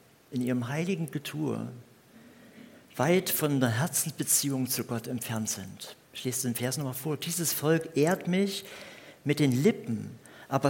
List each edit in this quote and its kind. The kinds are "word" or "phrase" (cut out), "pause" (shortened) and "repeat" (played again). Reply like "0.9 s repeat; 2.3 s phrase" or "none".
6.0 s pause